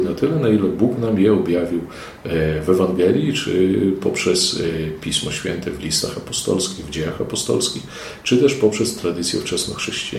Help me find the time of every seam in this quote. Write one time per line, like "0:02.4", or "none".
none